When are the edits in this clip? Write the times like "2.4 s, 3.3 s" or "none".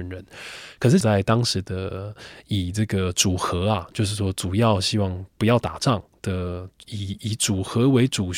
1.0 s